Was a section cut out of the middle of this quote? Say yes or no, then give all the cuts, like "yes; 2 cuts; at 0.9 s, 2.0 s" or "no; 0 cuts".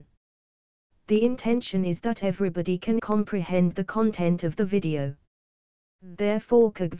yes; 1 cut; at 3.0 s